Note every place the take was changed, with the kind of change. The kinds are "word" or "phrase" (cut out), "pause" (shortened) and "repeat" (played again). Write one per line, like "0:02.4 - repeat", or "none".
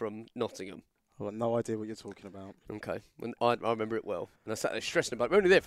0:01.0 - pause
0:04.4 - pause